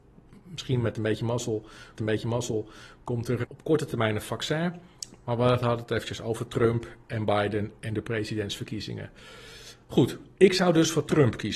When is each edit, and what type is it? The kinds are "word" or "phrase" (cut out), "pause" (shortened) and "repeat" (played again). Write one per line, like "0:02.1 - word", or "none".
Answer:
0:02.0 - repeat
0:03.4 - word